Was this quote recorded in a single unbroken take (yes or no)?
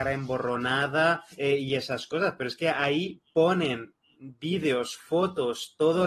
no